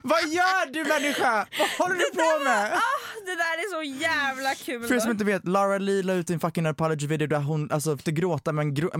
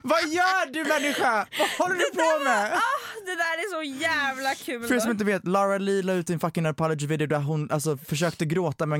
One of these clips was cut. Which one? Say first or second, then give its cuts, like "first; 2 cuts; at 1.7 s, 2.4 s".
first; 1 cut; at 8.0 s